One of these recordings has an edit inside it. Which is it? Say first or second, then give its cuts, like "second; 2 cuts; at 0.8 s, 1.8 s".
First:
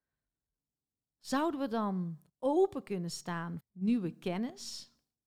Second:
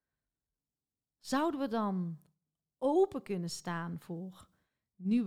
first; 2 cuts; at 2.3 s, 3.6 s